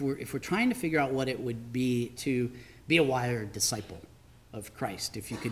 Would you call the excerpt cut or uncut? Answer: cut